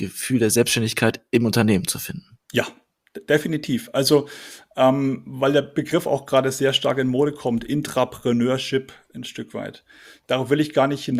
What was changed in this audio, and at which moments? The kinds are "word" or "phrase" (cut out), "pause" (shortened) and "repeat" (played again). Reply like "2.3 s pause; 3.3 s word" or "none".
none